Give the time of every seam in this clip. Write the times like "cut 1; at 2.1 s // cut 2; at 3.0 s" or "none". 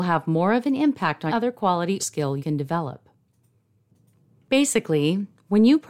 cut 1; at 1.3 s // cut 2; at 2.0 s // cut 3; at 2.4 s